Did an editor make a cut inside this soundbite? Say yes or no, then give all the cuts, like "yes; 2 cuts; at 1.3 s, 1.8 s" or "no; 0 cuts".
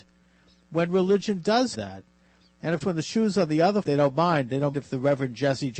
yes; 4 cuts; at 1.7 s, 2.8 s, 3.8 s, 4.7 s